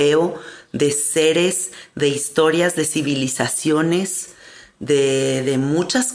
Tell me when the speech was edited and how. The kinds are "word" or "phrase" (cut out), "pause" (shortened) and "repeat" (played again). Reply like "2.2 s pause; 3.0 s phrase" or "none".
none